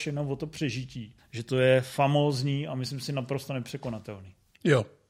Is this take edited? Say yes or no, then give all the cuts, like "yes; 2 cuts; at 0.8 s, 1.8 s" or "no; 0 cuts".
yes; 1 cut; at 1.2 s